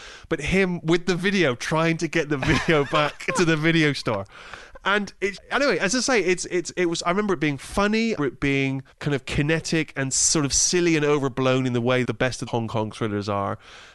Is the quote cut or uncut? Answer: cut